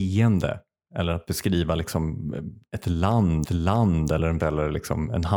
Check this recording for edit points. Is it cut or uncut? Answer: cut